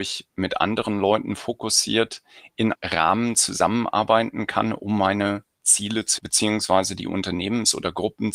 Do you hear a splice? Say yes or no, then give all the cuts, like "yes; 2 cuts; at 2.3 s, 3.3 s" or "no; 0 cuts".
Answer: yes; 2 cuts; at 2.7 s, 6.2 s